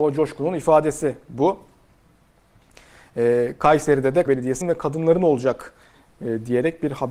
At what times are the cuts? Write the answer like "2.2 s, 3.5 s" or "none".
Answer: 4.3 s, 4.6 s